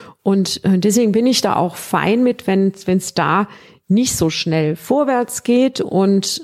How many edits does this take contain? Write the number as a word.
zero